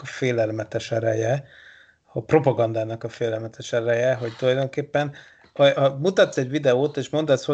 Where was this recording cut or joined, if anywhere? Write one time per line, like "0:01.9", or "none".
none